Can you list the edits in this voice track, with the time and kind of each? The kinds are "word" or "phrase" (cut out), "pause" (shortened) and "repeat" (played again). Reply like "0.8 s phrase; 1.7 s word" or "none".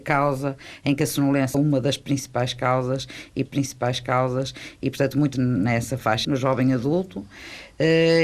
1.5 s word; 3.5 s repeat; 5.3 s word; 6.2 s word